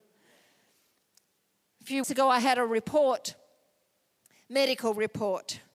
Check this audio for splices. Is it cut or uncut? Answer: cut